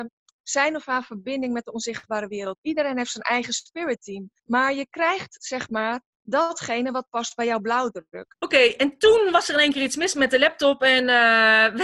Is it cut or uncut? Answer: cut